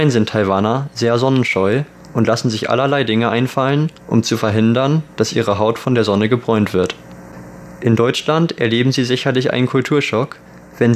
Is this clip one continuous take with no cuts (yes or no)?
yes